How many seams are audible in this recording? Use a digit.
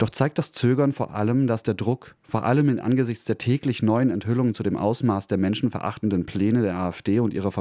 0